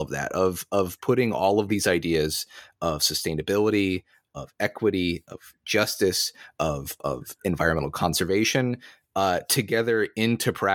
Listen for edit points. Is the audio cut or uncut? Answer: uncut